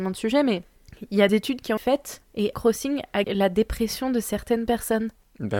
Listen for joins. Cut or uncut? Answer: cut